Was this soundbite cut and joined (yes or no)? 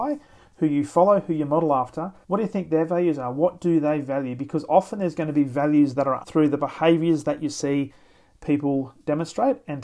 yes